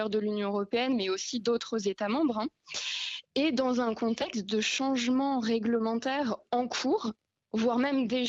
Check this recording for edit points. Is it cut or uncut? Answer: uncut